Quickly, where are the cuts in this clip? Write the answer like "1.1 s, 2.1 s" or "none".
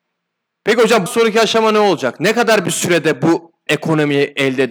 1.1 s, 3.7 s

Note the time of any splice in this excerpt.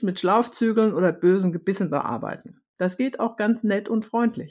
none

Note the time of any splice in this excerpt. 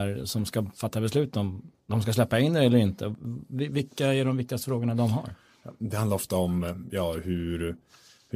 1.8 s

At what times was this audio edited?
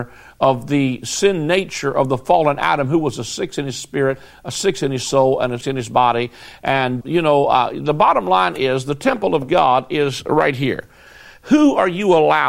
5.6 s, 7.0 s

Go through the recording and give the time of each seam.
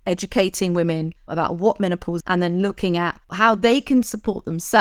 1.2 s, 2.2 s, 3.2 s

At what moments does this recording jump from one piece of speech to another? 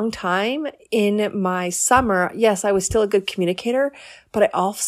none

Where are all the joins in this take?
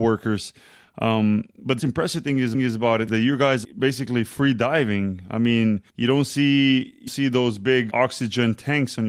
1.8 s, 2.5 s, 3.1 s, 3.6 s, 5.9 s, 7.1 s, 7.9 s

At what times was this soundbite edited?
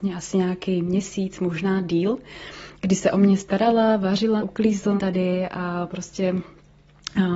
4.4 s, 5.0 s

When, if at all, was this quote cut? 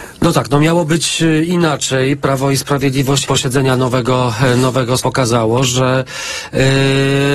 3.2 s, 5.0 s

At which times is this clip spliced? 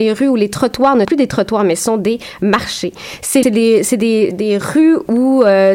1.0 s, 3.4 s, 4.3 s

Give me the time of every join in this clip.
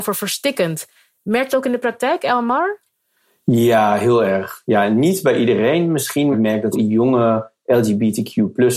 1.5 s, 6.3 s, 6.7 s

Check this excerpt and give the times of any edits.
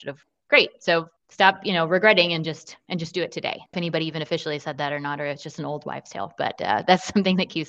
1.2 s, 3.7 s

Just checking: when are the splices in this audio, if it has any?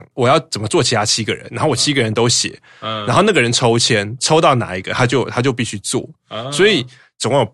none

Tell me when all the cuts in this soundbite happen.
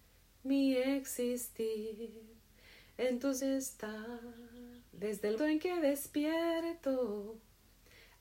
3.4 s, 4.9 s, 5.4 s

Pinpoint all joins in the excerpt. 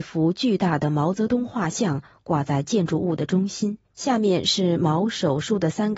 3.8 s

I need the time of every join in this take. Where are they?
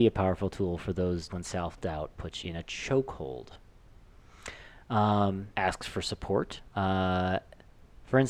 1.3 s, 2.4 s, 5.5 s, 6.7 s

